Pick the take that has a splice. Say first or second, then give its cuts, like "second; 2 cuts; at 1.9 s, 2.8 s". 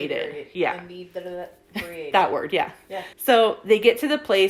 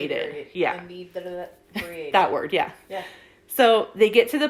first; 1 cut; at 3.1 s